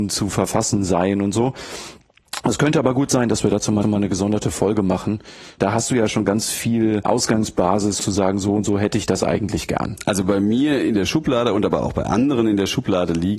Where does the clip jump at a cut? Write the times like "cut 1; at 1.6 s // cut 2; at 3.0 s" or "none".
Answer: cut 1; at 3.8 s // cut 2; at 8.0 s